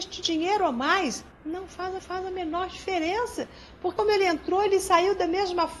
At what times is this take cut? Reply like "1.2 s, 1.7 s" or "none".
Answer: 1.3 s, 2.0 s, 4.0 s